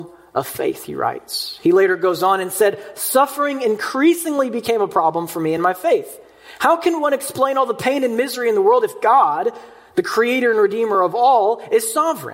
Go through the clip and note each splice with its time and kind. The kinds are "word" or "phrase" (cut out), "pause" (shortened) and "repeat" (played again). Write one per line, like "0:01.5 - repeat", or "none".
none